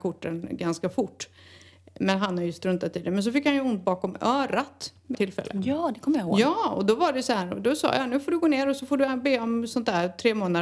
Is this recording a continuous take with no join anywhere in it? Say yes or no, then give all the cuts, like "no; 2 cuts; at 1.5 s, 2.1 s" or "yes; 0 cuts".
no; 1 cut; at 5.1 s